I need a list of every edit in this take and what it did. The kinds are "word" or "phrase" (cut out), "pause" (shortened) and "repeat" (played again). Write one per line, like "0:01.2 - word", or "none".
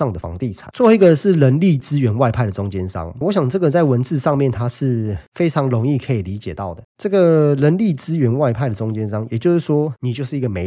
0:03.2 - word